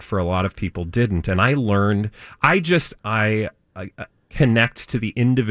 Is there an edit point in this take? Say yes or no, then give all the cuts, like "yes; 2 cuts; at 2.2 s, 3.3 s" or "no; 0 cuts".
yes; 1 cut; at 3.0 s